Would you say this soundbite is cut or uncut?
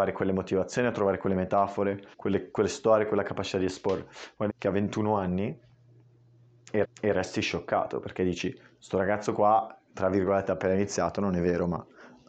cut